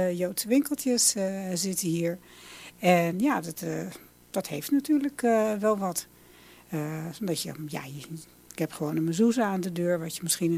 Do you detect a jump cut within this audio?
no; 0 cuts

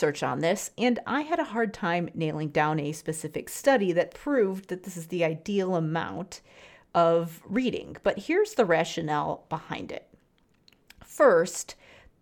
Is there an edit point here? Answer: no; 0 cuts

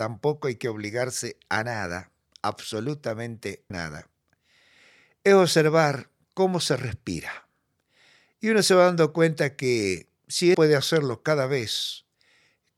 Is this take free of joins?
no; 2 cuts; at 3.7 s, 10.5 s

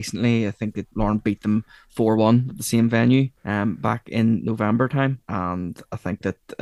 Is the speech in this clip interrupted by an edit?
yes; 3 cuts; at 0.9 s, 3.4 s, 5.2 s

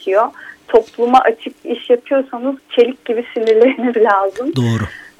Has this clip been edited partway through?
yes; 3 cuts; at 1.6 s, 2.6 s, 3.9 s

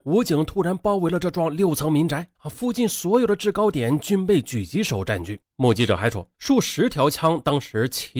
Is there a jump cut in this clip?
yes; 3 cuts; at 2.3 s, 5.5 s, 6.3 s

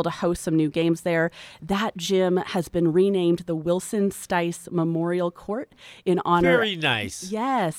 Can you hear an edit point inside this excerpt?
no; 0 cuts

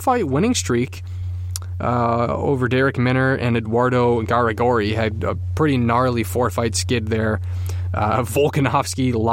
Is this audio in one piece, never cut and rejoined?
yes; 0 cuts

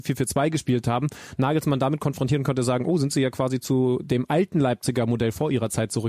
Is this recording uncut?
yes; 0 cuts

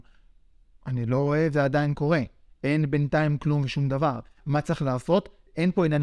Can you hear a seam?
no; 0 cuts

